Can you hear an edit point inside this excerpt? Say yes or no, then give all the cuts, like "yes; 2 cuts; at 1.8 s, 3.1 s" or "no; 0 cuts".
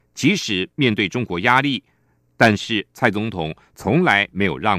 no; 0 cuts